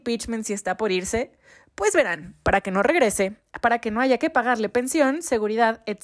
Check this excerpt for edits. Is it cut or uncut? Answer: uncut